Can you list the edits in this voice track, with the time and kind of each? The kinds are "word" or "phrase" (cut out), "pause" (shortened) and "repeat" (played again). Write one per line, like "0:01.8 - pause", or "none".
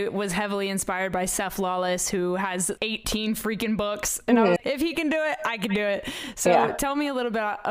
0:02.8 - word
0:04.6 - word